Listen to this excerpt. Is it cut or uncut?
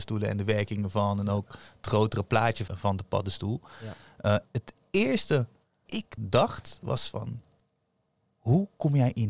cut